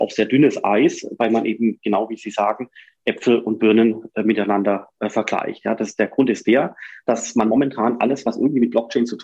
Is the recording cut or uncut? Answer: uncut